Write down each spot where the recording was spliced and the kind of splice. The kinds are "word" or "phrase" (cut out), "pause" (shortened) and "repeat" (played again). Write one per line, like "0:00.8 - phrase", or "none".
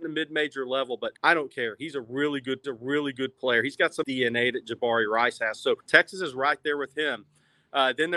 0:01.2 - pause
0:02.6 - repeat
0:04.0 - phrase
0:05.8 - pause